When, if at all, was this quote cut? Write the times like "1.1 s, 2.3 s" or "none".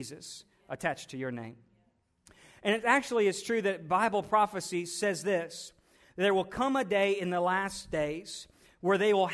none